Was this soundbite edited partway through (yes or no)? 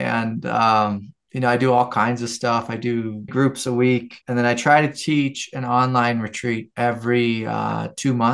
yes